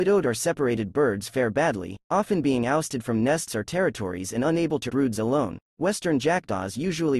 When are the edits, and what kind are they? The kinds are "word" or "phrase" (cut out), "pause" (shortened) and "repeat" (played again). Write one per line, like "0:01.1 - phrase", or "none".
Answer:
0:02.0 - pause
0:04.9 - word
0:05.7 - pause